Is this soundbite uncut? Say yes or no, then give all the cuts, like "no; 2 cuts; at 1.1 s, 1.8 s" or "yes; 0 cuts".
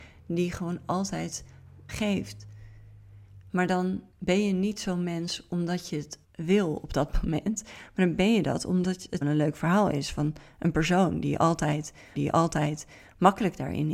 no; 5 cuts; at 1.9 s, 4.1 s, 6.2 s, 9.2 s, 12.2 s